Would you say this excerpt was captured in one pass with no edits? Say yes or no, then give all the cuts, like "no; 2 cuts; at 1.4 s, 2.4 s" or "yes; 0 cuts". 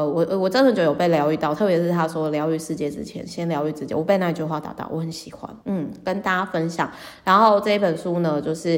no; 1 cut; at 5.6 s